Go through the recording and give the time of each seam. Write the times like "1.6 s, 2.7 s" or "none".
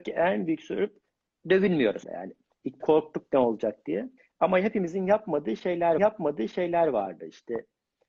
2.0 s, 2.8 s, 4.2 s, 6.0 s